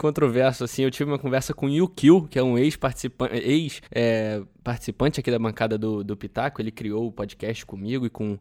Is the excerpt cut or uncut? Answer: cut